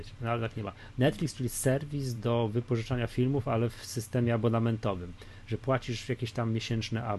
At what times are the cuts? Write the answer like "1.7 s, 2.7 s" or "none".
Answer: none